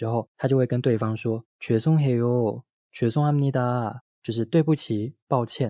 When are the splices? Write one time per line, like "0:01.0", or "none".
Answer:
0:01.5